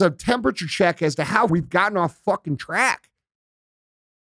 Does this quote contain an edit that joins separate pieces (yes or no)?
yes